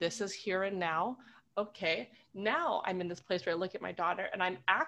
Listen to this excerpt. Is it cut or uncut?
uncut